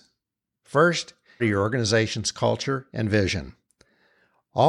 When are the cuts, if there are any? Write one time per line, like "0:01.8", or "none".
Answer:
0:01.4